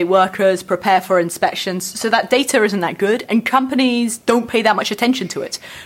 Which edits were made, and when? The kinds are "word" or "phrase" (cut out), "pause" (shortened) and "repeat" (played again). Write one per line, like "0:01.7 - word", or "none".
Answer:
none

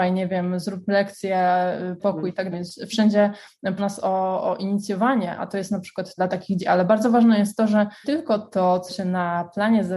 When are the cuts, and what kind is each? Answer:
0:02.0 - word
0:02.5 - word
0:03.8 - word
0:05.4 - word
0:06.2 - word
0:06.6 - word
0:08.0 - word
0:08.9 - word

